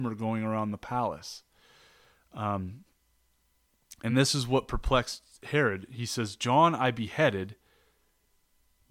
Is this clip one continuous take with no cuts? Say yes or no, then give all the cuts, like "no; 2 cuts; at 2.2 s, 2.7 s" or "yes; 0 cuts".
yes; 0 cuts